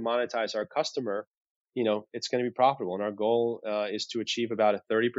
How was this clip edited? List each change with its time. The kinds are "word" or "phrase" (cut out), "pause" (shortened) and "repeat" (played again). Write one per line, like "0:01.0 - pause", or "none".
none